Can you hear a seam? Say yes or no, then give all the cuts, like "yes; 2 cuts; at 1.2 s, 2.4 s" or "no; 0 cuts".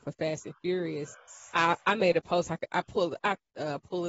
no; 0 cuts